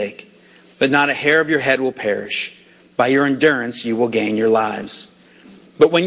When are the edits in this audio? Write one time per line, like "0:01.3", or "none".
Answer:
none